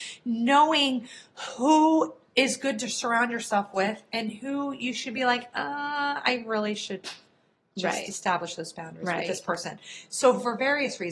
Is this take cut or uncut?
uncut